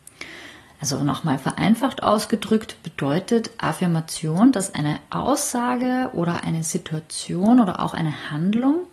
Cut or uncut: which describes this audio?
uncut